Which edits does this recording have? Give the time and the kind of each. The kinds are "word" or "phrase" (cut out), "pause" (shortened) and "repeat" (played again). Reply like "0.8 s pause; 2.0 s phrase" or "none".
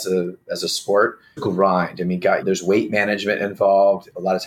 1.4 s phrase; 2.4 s word